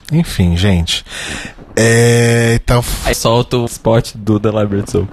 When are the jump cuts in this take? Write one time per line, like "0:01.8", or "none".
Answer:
0:03.1
0:03.7